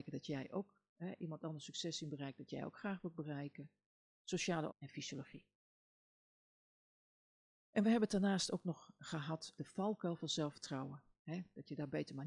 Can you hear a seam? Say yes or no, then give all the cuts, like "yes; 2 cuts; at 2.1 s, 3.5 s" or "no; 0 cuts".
yes; 2 cuts; at 4.7 s, 9.6 s